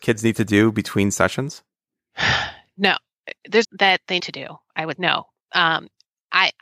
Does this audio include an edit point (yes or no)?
yes